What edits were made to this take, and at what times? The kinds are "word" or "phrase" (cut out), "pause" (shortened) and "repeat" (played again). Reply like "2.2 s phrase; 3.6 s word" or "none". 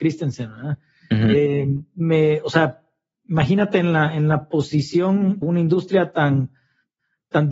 5.4 s phrase